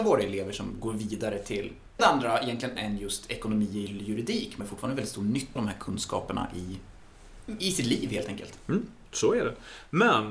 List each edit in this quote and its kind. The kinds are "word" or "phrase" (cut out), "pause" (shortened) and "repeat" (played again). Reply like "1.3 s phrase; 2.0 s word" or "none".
2.0 s word; 2.8 s word; 4.6 s word; 5.6 s word; 7.6 s word